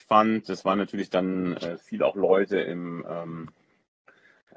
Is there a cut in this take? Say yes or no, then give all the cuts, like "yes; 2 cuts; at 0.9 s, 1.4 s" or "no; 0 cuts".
no; 0 cuts